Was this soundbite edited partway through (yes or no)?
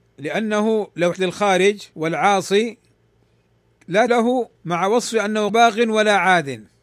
yes